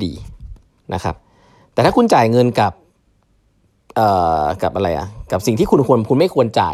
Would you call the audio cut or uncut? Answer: uncut